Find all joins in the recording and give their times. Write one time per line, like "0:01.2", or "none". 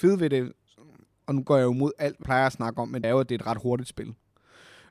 0:02.2
0:03.0